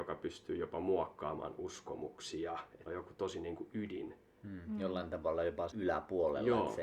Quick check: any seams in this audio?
yes; 2 cuts; at 2.9 s, 5.7 s

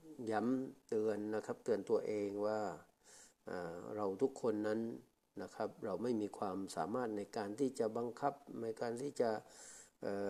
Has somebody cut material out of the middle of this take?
no; 0 cuts

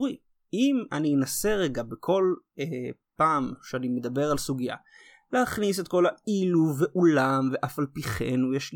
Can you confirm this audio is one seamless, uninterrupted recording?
yes; 0 cuts

